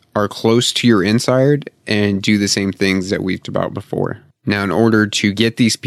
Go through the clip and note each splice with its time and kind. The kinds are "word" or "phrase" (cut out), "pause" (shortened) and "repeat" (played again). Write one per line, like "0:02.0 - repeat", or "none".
0:03.4 - word